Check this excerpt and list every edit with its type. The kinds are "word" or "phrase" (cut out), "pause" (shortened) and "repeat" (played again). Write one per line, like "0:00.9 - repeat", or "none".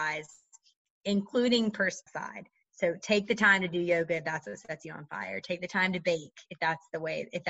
0:02.1 - word